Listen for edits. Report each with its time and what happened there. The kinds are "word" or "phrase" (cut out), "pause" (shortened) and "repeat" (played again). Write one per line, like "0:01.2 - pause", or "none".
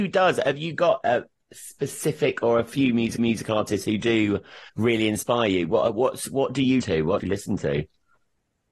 0:01.0 - word
0:03.2 - repeat
0:04.7 - pause
0:06.8 - word
0:07.2 - phrase